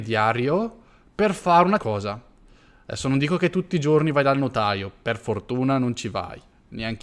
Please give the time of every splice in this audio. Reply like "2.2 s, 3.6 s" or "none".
1.8 s